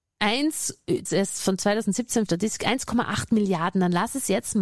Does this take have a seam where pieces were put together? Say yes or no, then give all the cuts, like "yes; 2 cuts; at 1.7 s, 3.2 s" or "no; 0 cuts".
yes; 2 cuts; at 1.1 s, 2.3 s